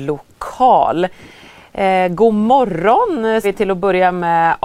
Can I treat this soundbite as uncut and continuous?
no; 1 cut; at 3.4 s

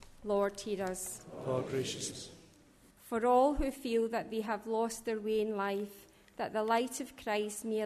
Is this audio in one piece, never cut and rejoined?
no; 2 cuts; at 2.1 s, 2.9 s

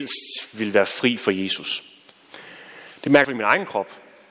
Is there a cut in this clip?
yes; 1 cut; at 3.2 s

